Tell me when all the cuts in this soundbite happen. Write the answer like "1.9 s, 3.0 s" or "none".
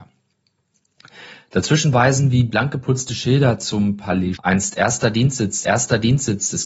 4.4 s, 5.6 s